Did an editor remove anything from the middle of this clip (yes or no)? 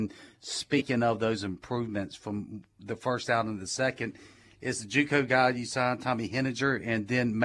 no